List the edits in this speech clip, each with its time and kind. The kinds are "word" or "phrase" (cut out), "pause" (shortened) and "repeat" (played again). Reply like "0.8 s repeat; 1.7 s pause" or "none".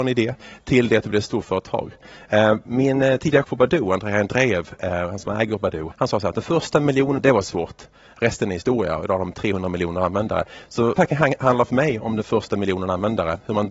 3.4 s word; 5.9 s word; 7.2 s word; 11.0 s word